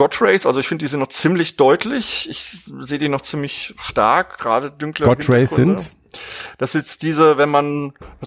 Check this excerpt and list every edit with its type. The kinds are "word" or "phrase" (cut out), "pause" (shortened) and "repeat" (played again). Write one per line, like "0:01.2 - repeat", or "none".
none

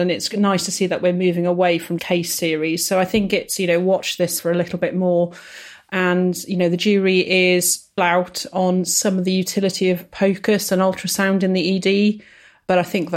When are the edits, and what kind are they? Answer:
0:02.0 - word
0:04.4 - word
0:08.0 - word

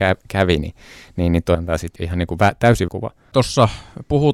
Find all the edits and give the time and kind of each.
0:01.5 - word
0:02.0 - word
0:02.9 - word

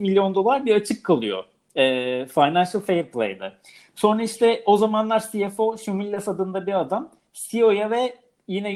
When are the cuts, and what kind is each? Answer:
none

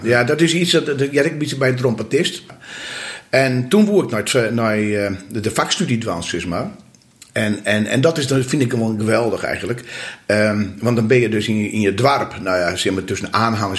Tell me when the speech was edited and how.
none

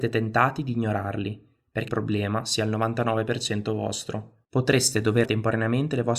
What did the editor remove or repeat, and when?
0:01.9 - phrase
0:04.4 - pause
0:05.3 - word

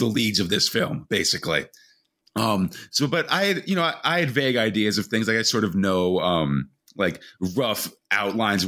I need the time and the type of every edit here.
none

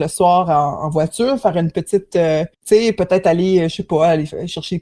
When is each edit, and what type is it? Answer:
0:02.5 - pause

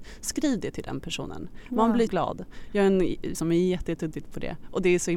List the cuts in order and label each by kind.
0:02.1 - word
0:03.3 - word
0:04.1 - word

